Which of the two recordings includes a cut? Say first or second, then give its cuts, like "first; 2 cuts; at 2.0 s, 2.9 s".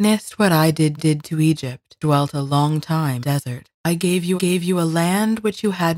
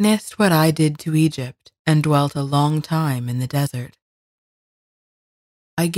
first; 5 cuts; at 1.0 s, 2.0 s, 3.2 s, 3.7 s, 4.4 s